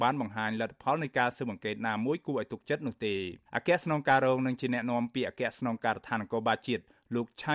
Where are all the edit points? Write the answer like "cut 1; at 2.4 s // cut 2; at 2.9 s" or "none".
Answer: cut 1; at 3.5 s